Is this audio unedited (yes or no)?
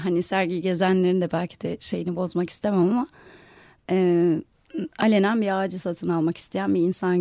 yes